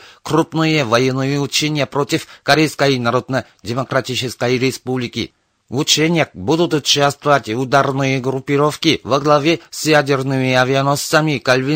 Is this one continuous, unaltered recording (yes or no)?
yes